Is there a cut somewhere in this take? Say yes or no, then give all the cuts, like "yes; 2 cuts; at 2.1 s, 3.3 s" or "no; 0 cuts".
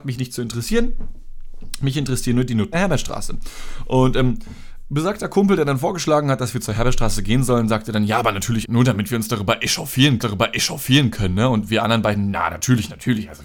yes; 3 cuts; at 2.7 s, 8.6 s, 10.2 s